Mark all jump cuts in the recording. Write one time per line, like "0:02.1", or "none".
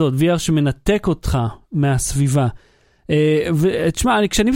none